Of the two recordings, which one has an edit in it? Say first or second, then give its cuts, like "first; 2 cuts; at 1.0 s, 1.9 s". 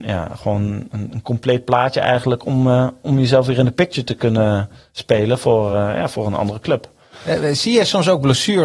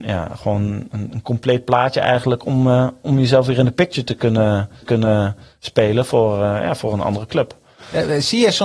second; 1 cut; at 4.8 s